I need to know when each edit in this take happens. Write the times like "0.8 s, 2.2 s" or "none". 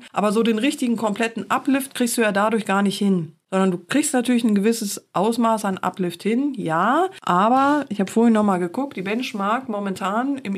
none